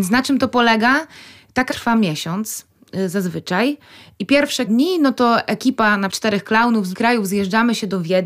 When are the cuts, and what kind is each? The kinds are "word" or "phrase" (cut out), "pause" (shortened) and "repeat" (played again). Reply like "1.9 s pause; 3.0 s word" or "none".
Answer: 1.7 s word; 4.7 s word; 6.1 s word; 6.9 s word